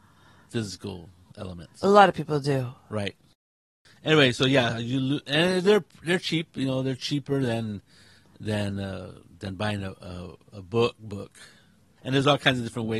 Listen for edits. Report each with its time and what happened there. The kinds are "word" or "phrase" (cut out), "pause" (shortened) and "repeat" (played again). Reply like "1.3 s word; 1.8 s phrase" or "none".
none